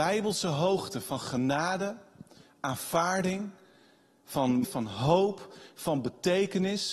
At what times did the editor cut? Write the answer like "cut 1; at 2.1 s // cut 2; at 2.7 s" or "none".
cut 1; at 4.6 s